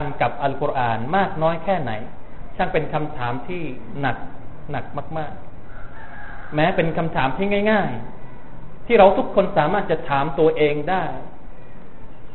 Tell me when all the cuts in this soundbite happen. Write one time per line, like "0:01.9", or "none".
none

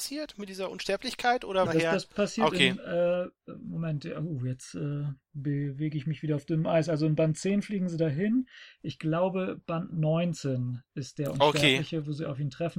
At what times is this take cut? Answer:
0:01.6

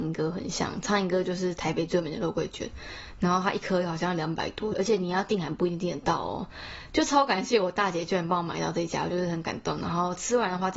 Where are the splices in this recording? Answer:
0:04.7

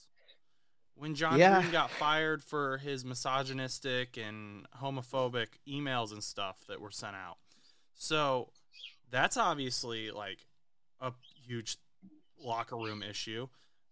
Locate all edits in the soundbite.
none

